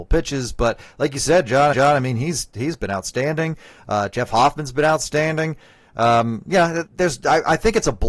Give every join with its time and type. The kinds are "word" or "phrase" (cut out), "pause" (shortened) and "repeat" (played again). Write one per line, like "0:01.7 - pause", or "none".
0:01.7 - repeat
0:06.9 - word